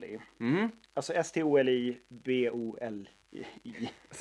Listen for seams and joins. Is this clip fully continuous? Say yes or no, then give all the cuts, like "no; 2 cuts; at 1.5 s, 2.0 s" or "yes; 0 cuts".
yes; 0 cuts